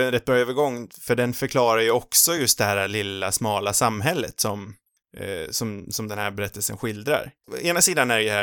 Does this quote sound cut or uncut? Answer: uncut